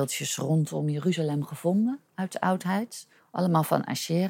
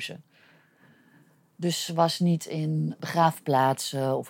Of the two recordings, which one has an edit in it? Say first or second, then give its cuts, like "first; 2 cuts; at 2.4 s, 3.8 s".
first; 2 cuts; at 2.1 s, 3.2 s